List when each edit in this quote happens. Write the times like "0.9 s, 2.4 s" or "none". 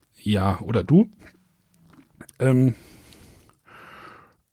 none